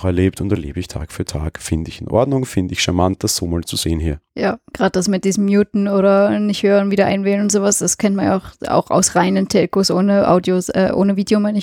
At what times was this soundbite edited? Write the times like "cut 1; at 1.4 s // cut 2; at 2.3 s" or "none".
cut 1; at 4.3 s